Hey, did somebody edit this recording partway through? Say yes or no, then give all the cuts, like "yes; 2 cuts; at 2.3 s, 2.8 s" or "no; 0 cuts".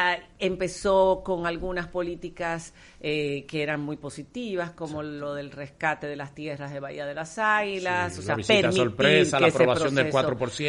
no; 0 cuts